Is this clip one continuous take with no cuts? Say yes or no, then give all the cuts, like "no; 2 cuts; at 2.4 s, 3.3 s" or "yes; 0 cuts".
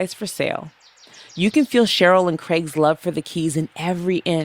yes; 0 cuts